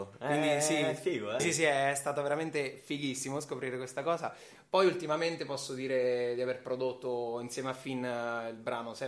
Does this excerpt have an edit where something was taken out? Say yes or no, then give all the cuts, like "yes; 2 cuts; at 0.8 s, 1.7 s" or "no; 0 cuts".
yes; 1 cut; at 1.4 s